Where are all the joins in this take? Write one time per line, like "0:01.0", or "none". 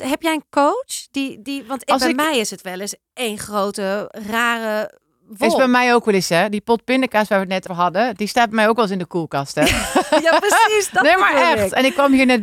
0:07.7